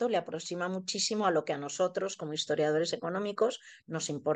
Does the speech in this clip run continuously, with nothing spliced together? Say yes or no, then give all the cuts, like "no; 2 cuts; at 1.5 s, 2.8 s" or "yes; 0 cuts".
yes; 0 cuts